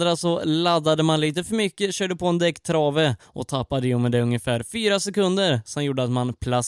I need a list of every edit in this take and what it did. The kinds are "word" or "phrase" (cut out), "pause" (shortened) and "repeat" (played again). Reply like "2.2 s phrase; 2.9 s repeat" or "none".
3.2 s pause